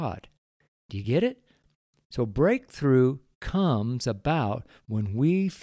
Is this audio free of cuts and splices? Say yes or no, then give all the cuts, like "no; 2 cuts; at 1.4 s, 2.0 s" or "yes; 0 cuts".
yes; 0 cuts